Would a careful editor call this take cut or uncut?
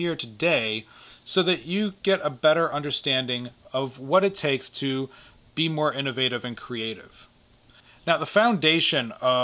uncut